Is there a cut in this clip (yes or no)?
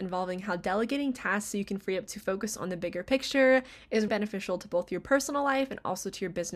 yes